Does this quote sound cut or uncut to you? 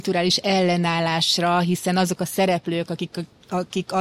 uncut